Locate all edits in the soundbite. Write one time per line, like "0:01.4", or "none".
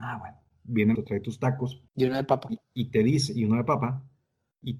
0:00.9
0:01.9
0:02.6